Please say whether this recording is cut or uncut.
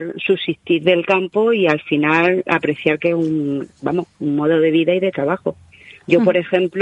uncut